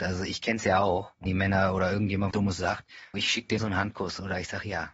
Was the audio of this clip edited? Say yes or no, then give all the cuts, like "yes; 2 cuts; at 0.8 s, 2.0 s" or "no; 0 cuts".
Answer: yes; 4 cuts; at 1.3 s, 2.3 s, 3.1 s, 3.6 s